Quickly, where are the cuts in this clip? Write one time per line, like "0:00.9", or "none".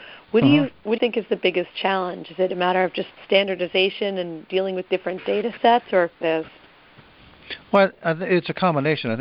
0:01.0
0:03.1
0:04.5
0:04.9
0:06.2